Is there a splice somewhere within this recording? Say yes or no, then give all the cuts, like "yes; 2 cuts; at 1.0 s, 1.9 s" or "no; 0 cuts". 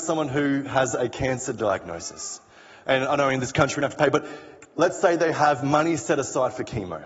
no; 0 cuts